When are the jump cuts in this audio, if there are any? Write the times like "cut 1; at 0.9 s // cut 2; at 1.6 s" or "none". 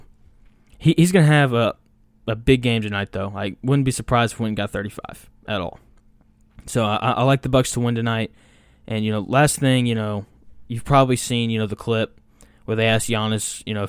none